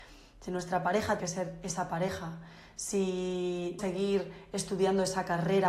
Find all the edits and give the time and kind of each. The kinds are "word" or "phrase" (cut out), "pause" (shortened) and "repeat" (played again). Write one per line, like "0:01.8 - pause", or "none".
0:01.2 - word
0:03.8 - word

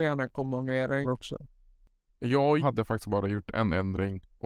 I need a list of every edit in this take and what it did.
0:01.0 - word
0:02.6 - phrase

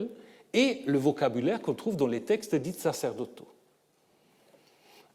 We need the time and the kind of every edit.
none

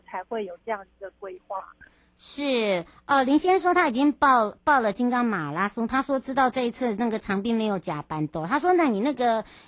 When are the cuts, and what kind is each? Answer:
none

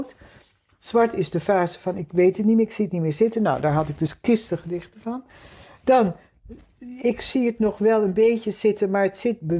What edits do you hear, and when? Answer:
none

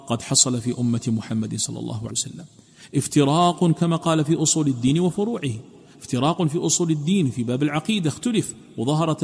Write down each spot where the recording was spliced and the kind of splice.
0:02.1 - word

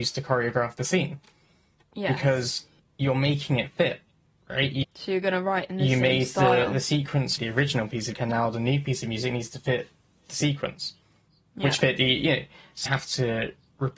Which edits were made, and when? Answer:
0:02.8 - pause
0:04.2 - pause
0:04.8 - word
0:07.4 - word
0:08.1 - word
0:12.9 - word

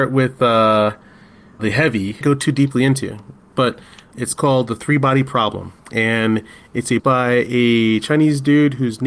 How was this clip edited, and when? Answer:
0:01.6 - word
0:02.2 - phrase
0:04.1 - word
0:05.8 - pause
0:07.0 - phrase

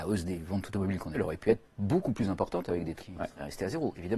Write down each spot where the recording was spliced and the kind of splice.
0:01.1 - word
0:03.0 - word

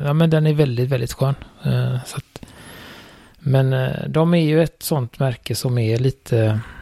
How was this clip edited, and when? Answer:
none

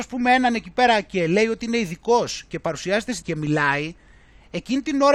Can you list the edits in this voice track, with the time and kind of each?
0:03.2 - word

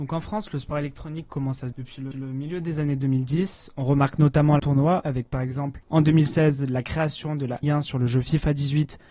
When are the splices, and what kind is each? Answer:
0:01.7 - word
0:02.1 - repeat
0:04.6 - phrase
0:05.8 - pause
0:07.6 - word

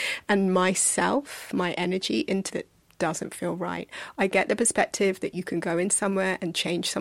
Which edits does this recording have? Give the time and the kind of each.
0:02.5 - word

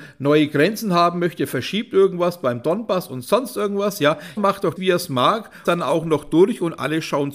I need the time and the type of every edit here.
0:04.4 - word
0:04.8 - word
0:05.7 - phrase

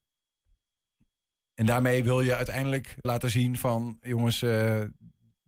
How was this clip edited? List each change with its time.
0:03.0 - word

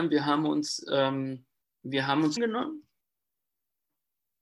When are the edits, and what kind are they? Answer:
0:02.4 - phrase

